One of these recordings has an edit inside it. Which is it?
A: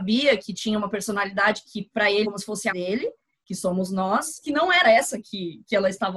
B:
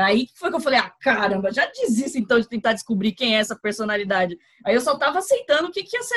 A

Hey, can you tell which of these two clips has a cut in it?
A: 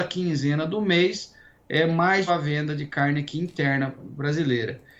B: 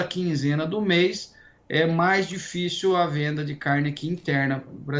A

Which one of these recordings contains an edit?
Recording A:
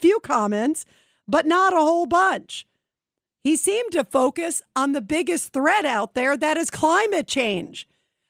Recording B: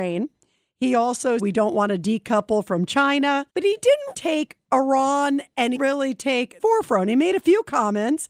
B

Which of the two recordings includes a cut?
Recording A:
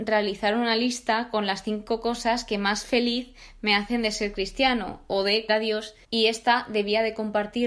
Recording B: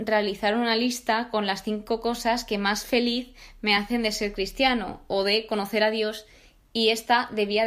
A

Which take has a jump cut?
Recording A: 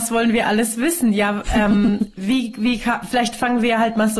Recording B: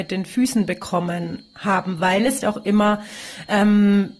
B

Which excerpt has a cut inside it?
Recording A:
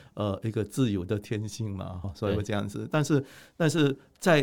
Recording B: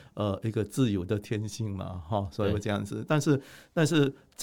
A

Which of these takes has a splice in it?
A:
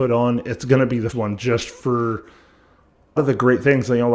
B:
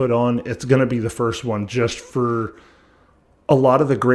A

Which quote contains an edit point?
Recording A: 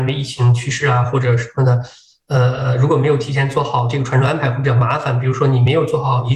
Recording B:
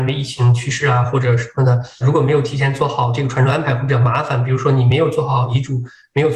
B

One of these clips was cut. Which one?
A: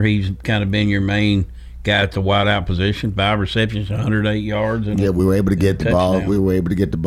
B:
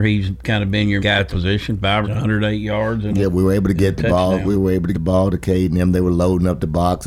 B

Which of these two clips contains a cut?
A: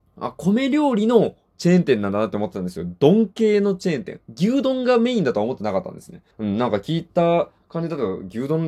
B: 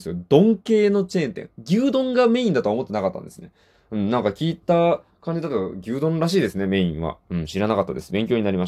A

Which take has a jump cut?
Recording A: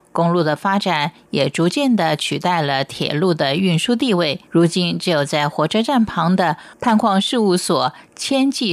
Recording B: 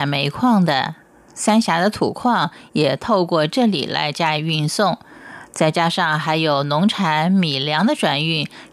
A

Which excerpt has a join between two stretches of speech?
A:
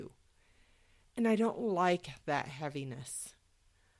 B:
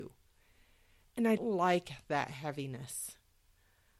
B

